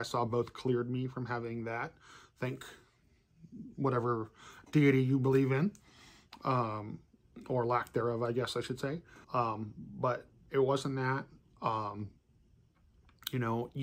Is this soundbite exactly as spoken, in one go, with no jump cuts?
no; 1 cut; at 9.2 s

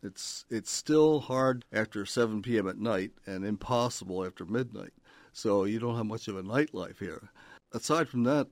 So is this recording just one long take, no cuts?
no; 1 cut; at 1.6 s

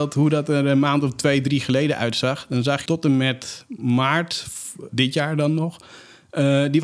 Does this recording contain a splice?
yes; 2 cuts; at 2.9 s, 4.9 s

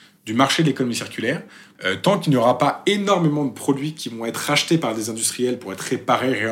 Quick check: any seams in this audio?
no; 0 cuts

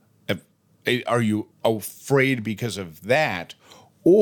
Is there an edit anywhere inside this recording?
yes; 1 cut; at 1.5 s

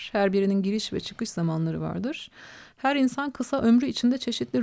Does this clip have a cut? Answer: no; 0 cuts

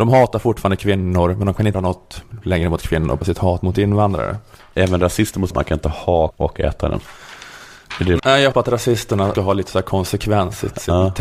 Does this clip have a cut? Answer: yes; 7 cuts; at 1.7 s, 3.2 s, 5.5 s, 6.3 s, 8.2 s, 8.5 s, 9.3 s

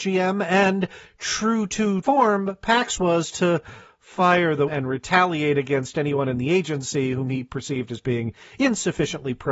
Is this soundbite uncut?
no; 3 cuts; at 2.0 s, 3.0 s, 4.7 s

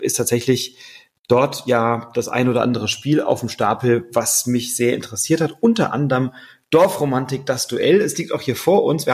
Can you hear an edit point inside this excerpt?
no; 0 cuts

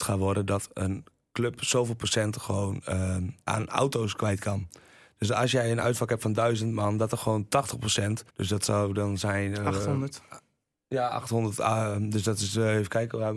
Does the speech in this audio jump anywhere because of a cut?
yes; 2 cuts; at 3.4 s, 8.3 s

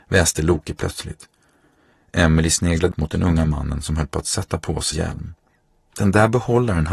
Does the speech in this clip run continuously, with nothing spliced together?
no; 2 cuts; at 2.9 s, 4.9 s

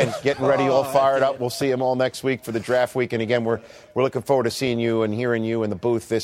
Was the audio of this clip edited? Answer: no; 0 cuts

